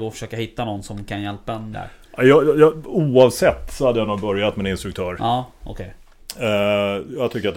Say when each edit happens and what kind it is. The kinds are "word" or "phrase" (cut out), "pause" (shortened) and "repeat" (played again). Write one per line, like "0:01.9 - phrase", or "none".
0:01.7 - phrase